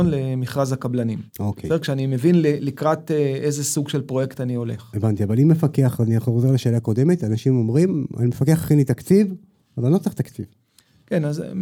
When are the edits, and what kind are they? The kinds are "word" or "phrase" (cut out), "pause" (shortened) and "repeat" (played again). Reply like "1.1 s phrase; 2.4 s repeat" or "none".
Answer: 1.3 s pause